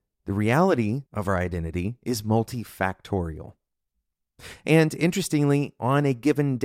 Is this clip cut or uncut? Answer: cut